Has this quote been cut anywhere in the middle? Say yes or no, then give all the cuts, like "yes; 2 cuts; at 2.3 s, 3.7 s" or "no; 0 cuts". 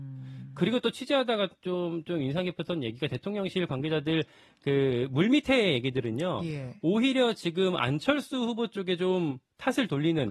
no; 0 cuts